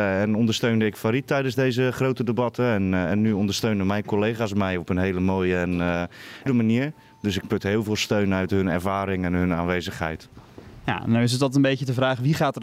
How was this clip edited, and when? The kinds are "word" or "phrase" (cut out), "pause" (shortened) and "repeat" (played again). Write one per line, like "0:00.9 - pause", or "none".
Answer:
0:06.5 - word

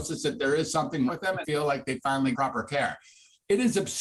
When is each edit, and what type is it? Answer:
0:01.1 - word
0:01.4 - word
0:02.3 - word

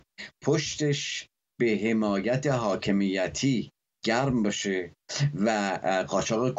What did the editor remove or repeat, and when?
none

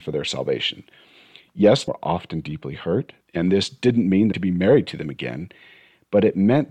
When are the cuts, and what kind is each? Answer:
0:01.9 - word
0:03.2 - pause
0:04.3 - phrase

